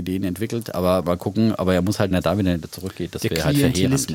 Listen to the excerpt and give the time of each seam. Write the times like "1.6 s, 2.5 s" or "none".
2.1 s